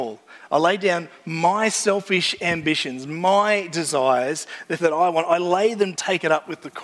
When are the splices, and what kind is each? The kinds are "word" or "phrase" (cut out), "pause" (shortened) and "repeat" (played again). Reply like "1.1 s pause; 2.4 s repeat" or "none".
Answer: 4.8 s word; 5.9 s phrase